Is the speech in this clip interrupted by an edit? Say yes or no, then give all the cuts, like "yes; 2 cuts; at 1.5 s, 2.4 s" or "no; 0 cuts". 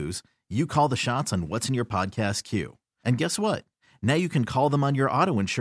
no; 0 cuts